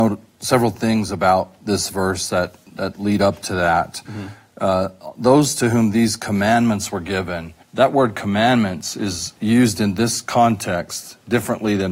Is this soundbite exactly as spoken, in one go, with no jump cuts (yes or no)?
no